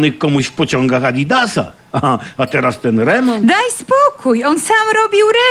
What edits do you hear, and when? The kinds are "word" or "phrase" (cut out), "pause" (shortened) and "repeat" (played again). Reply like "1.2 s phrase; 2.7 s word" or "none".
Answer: none